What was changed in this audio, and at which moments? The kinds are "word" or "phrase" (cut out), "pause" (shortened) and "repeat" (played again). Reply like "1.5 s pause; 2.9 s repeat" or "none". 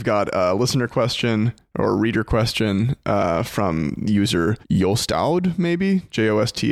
4.6 s pause

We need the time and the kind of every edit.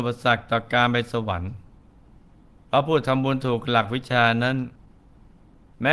none

